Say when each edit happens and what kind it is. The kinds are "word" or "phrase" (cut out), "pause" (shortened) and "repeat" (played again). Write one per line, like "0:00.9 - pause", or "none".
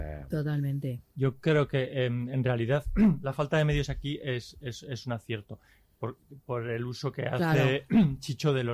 none

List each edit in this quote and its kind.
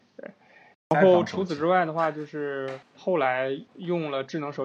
0:02.8 - pause
0:03.7 - pause

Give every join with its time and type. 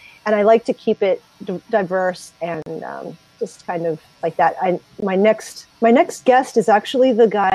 0:05.7 - pause

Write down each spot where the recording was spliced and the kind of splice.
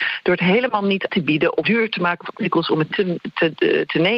0:01.1 - word
0:01.6 - word
0:02.3 - word
0:02.9 - word

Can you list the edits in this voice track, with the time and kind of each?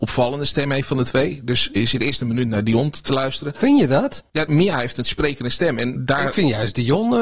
0:01.8 - word
0:06.0 - word

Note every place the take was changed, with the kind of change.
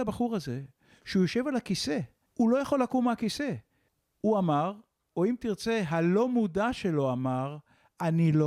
0:02.3 - pause
0:03.9 - pause

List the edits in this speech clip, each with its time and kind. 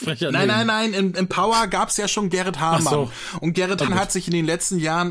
0:03.9 - word

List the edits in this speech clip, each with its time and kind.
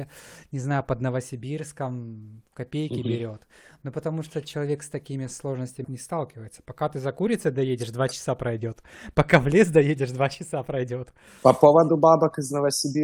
0:05.8 - word

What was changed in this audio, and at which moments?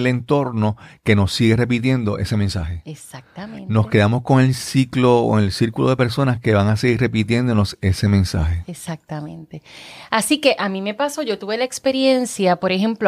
none

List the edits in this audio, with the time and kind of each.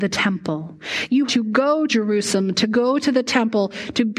0:01.3 - word
0:01.9 - word

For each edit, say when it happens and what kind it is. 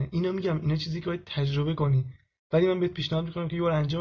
none

